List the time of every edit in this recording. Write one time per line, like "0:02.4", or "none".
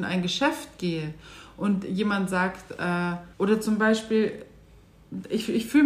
0:03.3